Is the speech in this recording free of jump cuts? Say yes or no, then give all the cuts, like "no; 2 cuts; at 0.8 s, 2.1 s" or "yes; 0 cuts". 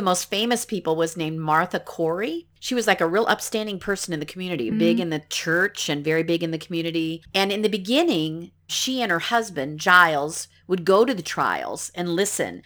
no; 1 cut; at 4.7 s